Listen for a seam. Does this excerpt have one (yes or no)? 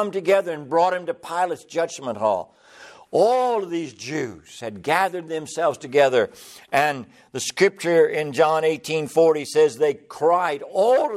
no